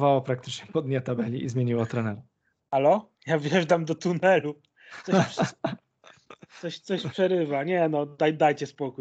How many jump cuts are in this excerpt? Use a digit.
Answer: 1